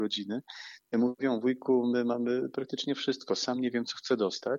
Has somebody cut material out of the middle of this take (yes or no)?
no